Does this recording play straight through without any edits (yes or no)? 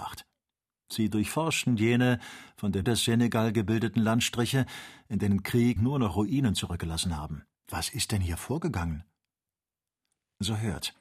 no